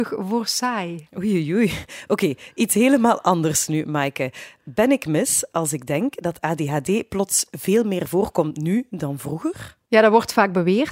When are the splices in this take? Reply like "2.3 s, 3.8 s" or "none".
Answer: 9.8 s

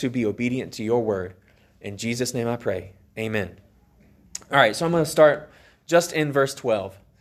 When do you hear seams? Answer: none

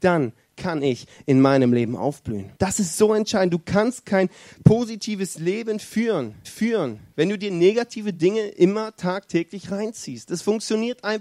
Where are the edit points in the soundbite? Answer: 2.6 s, 6.4 s

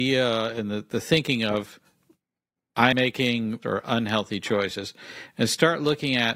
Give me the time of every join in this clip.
2.9 s, 3.6 s

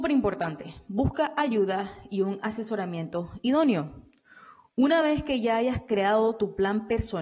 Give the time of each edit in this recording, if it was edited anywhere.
none

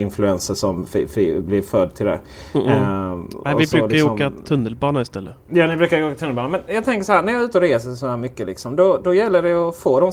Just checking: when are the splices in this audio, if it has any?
none

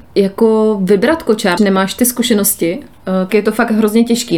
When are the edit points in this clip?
1.6 s, 3.3 s

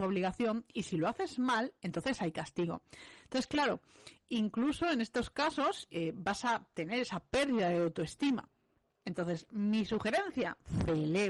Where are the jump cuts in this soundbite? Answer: none

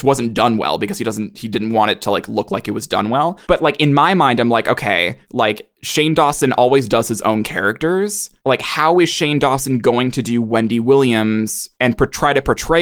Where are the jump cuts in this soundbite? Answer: 3.4 s, 5.2 s, 8.4 s, 11.7 s

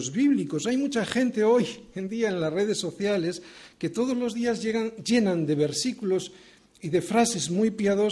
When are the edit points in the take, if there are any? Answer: none

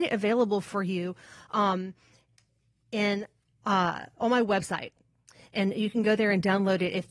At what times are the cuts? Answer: none

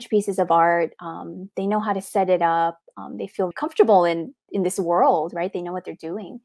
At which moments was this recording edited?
3.5 s, 4.4 s

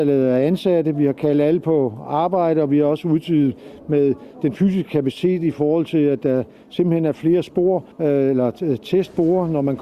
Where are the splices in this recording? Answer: 7.9 s

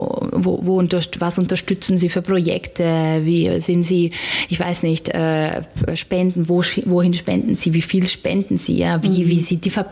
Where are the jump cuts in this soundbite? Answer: none

